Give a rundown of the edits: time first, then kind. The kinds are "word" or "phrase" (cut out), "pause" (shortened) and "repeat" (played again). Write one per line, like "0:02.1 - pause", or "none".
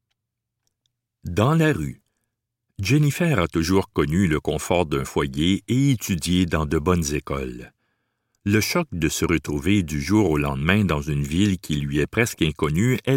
none